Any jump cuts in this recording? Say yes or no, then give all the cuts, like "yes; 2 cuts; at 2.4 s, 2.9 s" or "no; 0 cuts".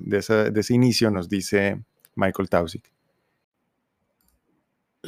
no; 0 cuts